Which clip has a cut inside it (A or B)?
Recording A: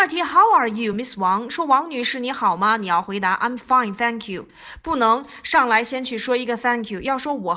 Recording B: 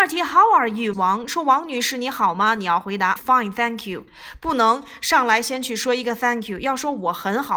B